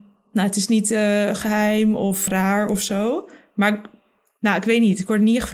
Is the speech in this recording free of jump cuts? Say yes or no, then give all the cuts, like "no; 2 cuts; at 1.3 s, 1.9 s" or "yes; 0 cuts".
no; 1 cut; at 2.3 s